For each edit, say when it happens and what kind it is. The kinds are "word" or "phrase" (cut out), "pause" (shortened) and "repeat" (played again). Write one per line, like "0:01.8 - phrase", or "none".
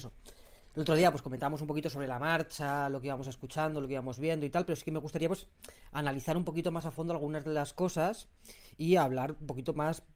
none